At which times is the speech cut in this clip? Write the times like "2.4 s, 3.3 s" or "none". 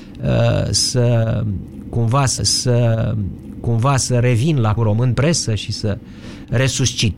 2.4 s, 4.8 s, 5.1 s